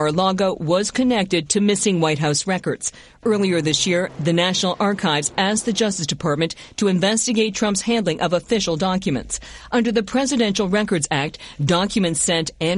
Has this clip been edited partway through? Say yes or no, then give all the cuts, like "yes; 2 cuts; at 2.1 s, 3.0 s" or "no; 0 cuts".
no; 0 cuts